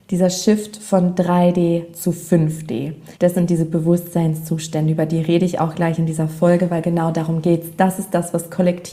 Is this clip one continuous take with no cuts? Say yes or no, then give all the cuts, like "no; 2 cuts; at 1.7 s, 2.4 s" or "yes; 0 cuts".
no; 1 cut; at 3.1 s